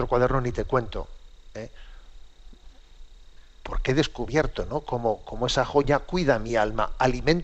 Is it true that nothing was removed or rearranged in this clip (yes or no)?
yes